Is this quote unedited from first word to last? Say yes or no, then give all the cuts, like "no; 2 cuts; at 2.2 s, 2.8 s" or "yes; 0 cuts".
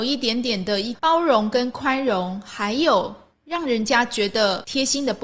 no; 1 cut; at 3.3 s